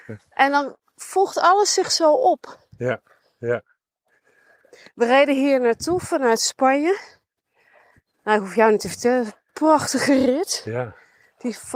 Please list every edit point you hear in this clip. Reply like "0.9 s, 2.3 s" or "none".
none